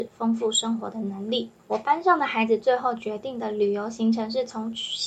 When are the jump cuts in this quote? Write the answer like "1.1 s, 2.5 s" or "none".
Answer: 1.6 s